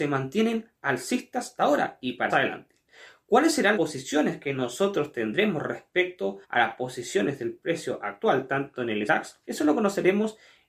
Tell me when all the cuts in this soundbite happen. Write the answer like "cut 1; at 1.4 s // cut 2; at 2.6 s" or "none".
cut 1; at 1.6 s // cut 2; at 2.3 s // cut 3; at 3.7 s // cut 4; at 6.4 s // cut 5; at 9.1 s // cut 6; at 9.4 s